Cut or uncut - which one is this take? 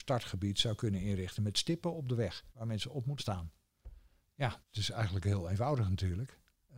cut